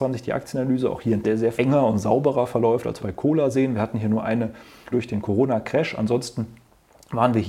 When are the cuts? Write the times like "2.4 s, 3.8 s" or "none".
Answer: 1.2 s, 1.5 s, 3.0 s, 4.9 s